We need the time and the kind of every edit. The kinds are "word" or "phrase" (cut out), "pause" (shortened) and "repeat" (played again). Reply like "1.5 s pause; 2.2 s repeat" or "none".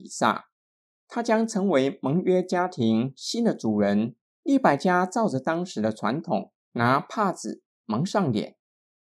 4.2 s pause